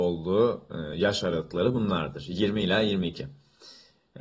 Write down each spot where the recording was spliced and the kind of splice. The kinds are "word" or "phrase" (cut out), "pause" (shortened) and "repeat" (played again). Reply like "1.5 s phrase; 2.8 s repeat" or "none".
none